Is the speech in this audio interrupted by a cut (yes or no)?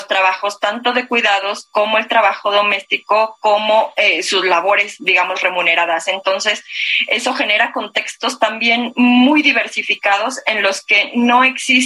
yes